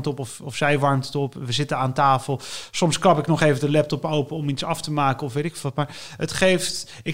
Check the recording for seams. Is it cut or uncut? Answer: uncut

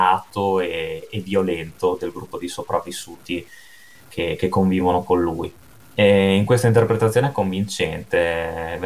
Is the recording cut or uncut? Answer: uncut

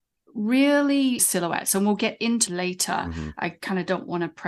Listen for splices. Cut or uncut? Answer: cut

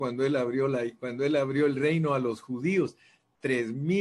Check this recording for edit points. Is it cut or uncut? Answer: uncut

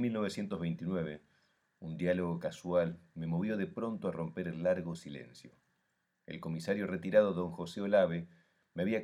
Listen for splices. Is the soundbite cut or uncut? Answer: uncut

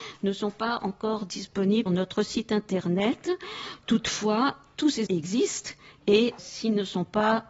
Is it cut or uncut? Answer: cut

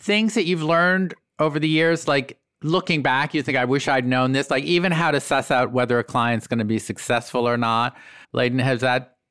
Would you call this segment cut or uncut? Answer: cut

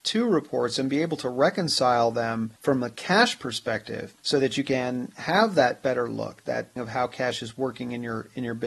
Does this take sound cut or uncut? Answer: cut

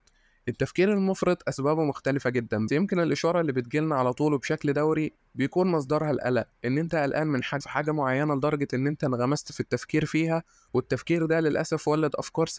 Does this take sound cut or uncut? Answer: cut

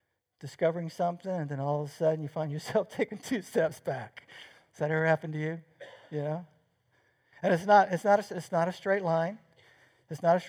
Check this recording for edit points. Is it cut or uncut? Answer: uncut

